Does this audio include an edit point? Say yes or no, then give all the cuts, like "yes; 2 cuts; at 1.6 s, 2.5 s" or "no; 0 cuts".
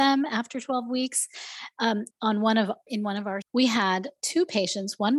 yes; 3 cuts; at 2.1 s, 2.9 s, 3.4 s